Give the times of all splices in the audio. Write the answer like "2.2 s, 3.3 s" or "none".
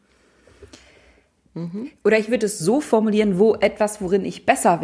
none

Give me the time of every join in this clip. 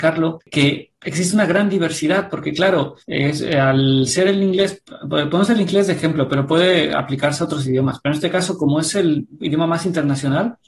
3.0 s

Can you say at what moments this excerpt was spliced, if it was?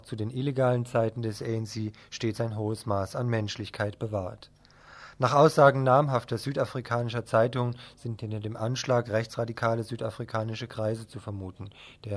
none

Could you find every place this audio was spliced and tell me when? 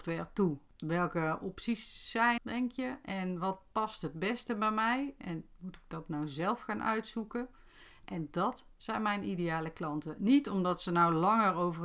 2.4 s

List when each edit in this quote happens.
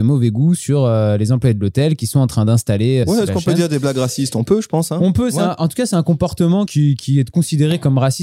3.0 s, 6.7 s

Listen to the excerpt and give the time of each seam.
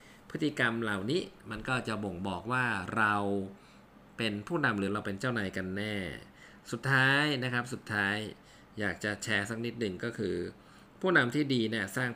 none

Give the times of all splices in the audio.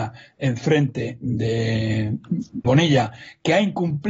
2.6 s

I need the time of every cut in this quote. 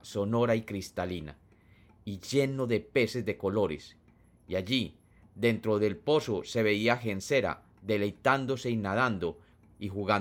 none

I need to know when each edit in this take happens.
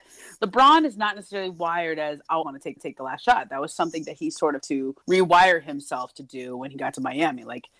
2.4 s, 2.8 s, 4.6 s, 5.0 s

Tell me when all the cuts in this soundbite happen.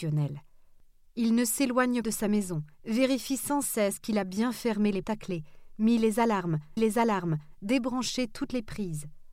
2.0 s, 2.7 s, 5.0 s, 6.8 s

